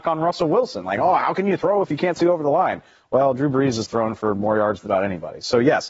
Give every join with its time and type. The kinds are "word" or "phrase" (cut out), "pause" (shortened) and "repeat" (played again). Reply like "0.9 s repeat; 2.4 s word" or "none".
4.9 s word